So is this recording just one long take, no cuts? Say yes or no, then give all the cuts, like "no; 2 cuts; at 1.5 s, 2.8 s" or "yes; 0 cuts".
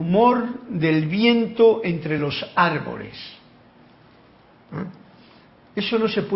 yes; 0 cuts